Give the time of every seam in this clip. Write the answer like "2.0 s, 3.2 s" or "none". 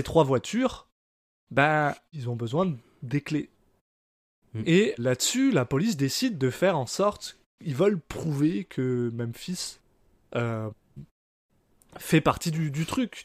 2.1 s, 5.0 s